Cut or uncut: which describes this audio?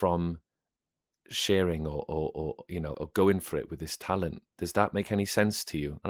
cut